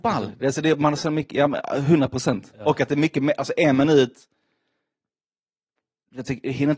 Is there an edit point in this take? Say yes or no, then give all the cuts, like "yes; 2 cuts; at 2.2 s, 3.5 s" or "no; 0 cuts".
no; 0 cuts